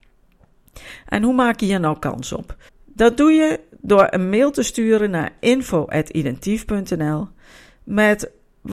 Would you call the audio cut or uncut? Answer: cut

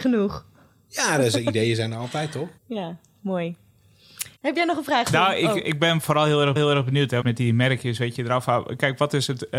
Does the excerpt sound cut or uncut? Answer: cut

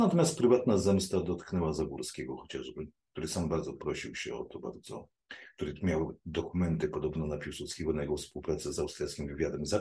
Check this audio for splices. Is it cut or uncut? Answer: uncut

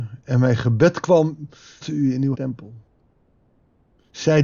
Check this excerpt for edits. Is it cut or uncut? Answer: cut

